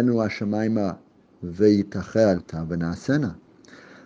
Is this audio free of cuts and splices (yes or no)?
no